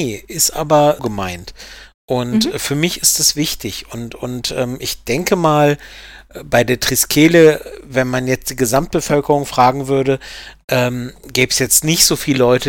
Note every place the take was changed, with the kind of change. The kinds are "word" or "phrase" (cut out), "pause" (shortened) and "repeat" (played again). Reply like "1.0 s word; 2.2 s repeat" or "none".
1.0 s word